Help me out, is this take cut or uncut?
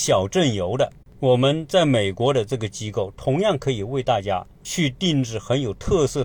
uncut